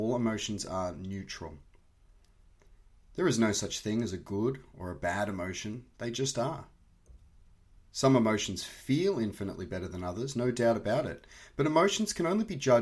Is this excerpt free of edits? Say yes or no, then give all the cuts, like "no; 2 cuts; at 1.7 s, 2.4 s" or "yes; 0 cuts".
yes; 0 cuts